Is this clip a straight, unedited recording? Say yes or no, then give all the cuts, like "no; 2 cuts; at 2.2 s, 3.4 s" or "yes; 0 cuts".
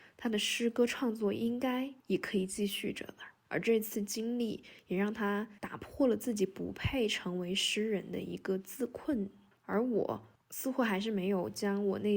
no; 4 cuts; at 2.0 s, 3.4 s, 5.6 s, 9.5 s